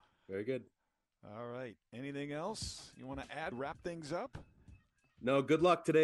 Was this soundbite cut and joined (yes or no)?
yes